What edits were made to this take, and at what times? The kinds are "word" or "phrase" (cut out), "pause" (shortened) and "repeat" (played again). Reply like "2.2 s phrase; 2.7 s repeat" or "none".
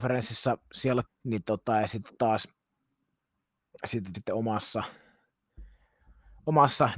1.1 s phrase; 4.1 s word